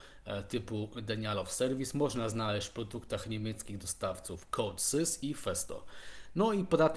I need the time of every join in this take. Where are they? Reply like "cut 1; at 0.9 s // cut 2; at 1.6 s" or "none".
none